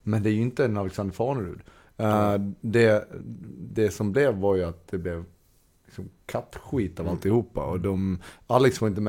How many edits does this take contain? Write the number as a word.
zero